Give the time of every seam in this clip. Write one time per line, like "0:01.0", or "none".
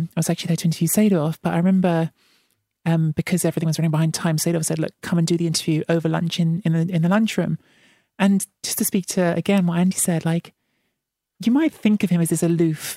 none